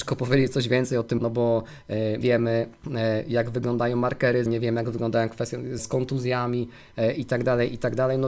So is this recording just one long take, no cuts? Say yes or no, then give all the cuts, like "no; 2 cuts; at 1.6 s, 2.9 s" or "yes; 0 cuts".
no; 4 cuts; at 1.2 s, 2.2 s, 4.5 s, 5.8 s